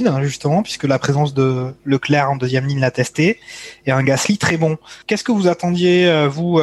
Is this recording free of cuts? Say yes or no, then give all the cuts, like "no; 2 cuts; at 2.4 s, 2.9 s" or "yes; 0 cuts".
no; 2 cuts; at 1.8 s, 5.0 s